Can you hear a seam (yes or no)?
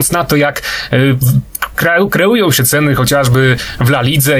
no